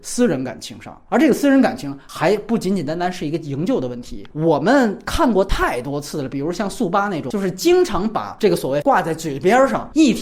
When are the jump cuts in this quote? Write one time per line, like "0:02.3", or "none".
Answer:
0:08.8